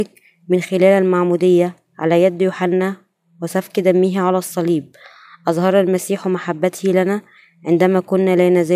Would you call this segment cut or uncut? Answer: uncut